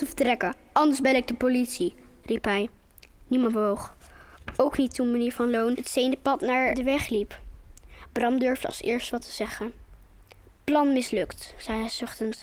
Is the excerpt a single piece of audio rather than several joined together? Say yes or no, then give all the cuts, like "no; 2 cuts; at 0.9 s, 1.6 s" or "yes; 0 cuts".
yes; 0 cuts